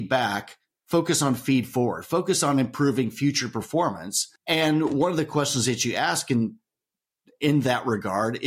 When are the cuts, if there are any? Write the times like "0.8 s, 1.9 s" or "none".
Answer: 4.4 s